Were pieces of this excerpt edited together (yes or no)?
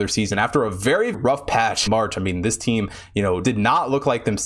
yes